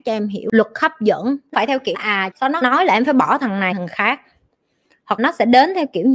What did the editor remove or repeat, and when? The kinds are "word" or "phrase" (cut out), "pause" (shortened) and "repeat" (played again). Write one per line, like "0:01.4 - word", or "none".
0:01.5 - word
0:01.9 - word
0:02.3 - word
0:02.6 - word
0:03.7 - word
0:05.2 - word